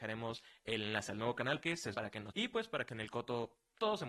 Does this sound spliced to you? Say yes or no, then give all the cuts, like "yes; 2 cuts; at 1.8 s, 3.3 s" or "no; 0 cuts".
yes; 4 cuts; at 1.6 s, 1.9 s, 2.3 s, 2.9 s